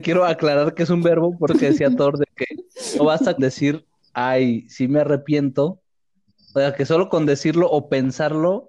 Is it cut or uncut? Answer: cut